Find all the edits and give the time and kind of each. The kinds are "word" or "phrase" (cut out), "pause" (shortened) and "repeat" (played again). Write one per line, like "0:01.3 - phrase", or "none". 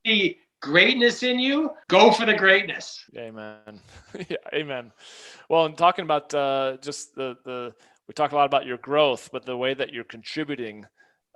0:01.8 - pause
0:03.1 - pause